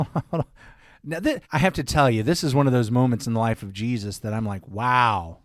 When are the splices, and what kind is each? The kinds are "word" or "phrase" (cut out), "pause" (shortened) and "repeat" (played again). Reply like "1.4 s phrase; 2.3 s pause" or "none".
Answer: 1.4 s pause